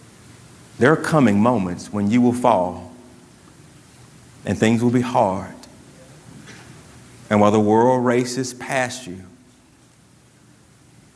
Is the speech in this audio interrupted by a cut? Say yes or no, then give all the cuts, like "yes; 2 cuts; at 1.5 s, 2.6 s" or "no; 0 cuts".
no; 0 cuts